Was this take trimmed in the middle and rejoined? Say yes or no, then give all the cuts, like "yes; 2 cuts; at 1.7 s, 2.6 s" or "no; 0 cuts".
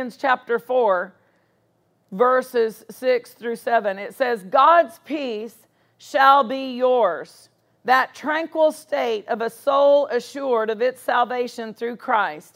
no; 0 cuts